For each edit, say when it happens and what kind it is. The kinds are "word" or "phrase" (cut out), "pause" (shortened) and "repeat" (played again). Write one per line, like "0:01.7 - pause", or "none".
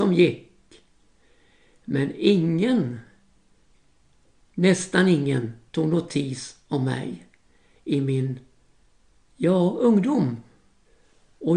none

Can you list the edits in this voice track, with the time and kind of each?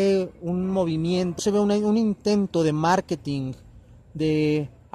0:01.4 - word

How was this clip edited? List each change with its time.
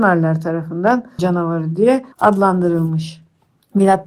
0:01.2 - phrase
0:02.1 - pause

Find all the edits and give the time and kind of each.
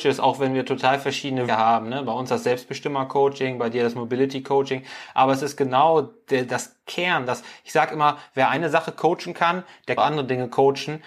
0:01.5 - word
0:10.0 - phrase

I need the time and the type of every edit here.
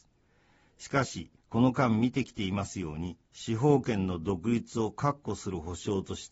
0:01.4 - pause
0:03.2 - pause

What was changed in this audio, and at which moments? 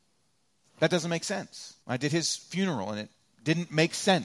0:01.8 - pause

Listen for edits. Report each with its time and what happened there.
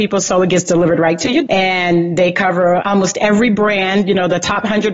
0:01.5 - word
0:02.8 - word

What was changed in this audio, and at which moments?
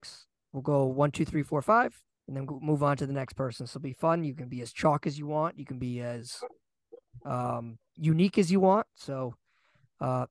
0:02.1 - pause
0:03.7 - word

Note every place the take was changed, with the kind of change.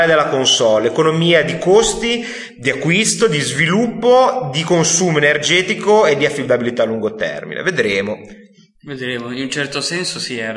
none

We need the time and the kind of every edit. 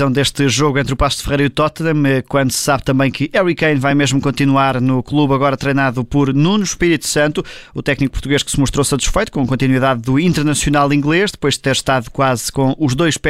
none

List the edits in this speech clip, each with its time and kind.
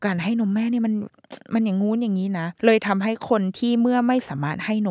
0:02.6 - pause

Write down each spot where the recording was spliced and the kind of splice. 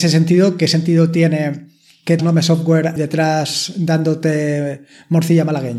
0:02.2 - word
0:03.0 - word

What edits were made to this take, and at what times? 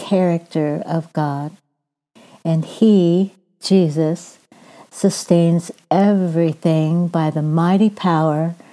none

